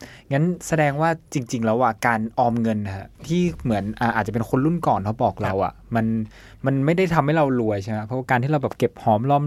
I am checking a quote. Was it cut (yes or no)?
yes